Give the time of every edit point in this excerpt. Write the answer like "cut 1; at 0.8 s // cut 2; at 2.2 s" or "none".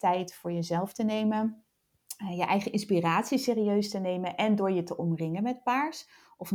none